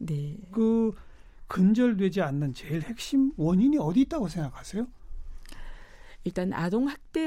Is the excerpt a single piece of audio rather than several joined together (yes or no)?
yes